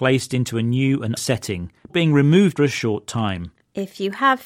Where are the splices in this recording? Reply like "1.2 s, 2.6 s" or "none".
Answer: 1.2 s, 1.9 s, 2.5 s